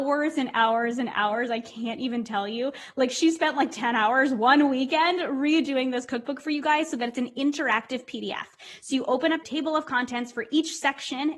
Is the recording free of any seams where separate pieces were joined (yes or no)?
no